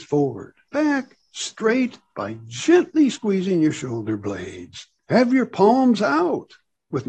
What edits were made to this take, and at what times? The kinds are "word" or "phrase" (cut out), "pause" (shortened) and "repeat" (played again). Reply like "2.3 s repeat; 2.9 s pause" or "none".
none